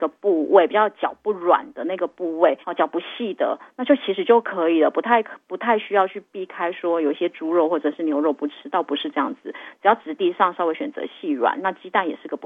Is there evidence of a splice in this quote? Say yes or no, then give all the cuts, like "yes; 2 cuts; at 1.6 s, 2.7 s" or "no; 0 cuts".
yes; 1 cut; at 2.6 s